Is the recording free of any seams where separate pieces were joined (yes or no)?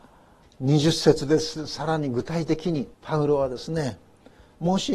no